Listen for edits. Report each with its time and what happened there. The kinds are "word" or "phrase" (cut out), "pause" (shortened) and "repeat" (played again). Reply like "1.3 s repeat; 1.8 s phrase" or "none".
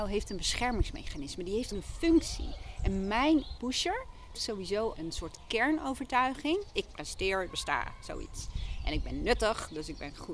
1.7 s word; 3.6 s word; 4.4 s word; 5.0 s word; 7.5 s phrase